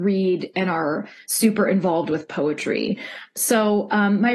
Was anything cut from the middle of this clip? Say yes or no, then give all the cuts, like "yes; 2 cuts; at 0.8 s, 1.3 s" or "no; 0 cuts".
no; 0 cuts